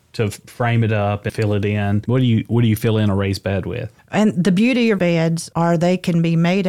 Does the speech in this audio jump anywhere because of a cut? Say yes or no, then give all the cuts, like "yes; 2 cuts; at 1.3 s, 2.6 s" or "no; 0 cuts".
yes; 3 cuts; at 1.3 s, 4.0 s, 5.0 s